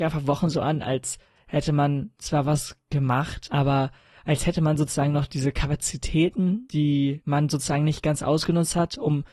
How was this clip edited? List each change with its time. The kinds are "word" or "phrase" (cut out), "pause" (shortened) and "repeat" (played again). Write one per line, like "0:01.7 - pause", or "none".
none